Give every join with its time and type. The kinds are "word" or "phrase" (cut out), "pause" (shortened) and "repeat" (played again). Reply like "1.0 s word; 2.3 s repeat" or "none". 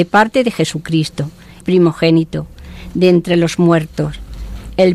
1.6 s phrase